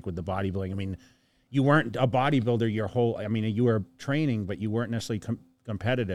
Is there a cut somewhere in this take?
no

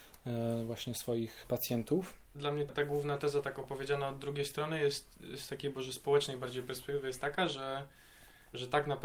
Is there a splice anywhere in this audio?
yes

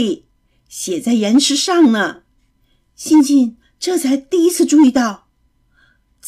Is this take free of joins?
yes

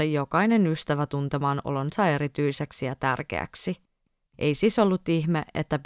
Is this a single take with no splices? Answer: yes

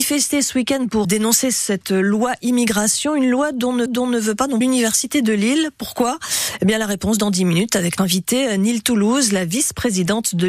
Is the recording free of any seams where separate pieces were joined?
no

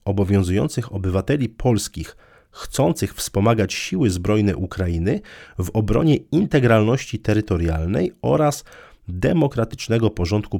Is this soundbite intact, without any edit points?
yes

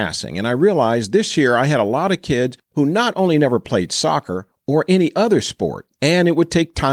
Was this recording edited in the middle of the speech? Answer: no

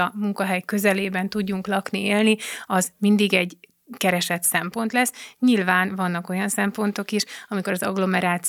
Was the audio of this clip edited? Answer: no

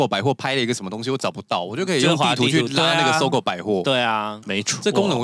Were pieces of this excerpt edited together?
no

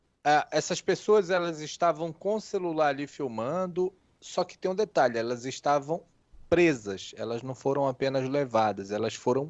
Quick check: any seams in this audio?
no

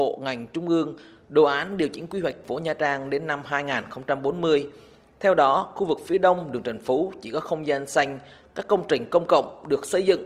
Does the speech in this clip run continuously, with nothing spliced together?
no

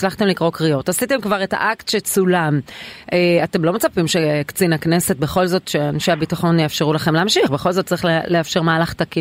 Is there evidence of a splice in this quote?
no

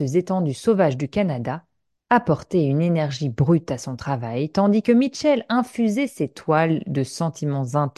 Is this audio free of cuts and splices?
yes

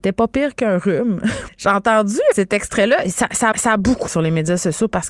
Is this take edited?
yes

